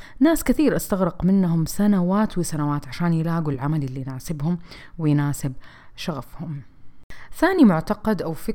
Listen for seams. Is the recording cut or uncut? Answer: uncut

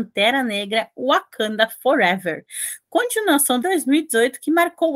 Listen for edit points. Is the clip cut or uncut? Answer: cut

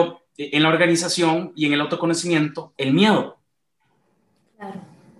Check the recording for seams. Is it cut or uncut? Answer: uncut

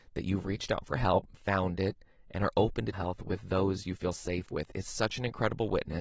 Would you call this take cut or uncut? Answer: cut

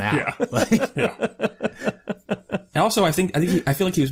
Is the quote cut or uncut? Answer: uncut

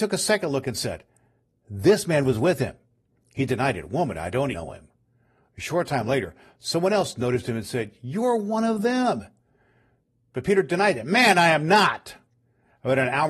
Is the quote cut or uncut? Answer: cut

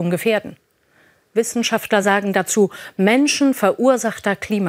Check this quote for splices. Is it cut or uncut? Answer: uncut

